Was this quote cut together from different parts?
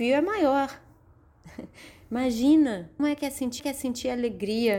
yes; 2 cuts; at 3.0 s, 3.6 s

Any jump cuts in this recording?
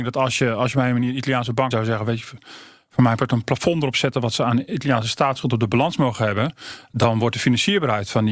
yes; 1 cut; at 1.7 s

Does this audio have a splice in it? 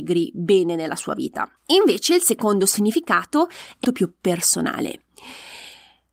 yes; 2 cuts; at 1.6 s, 3.8 s

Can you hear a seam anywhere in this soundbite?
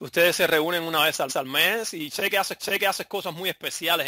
yes; 2 cuts; at 1.3 s, 2.6 s

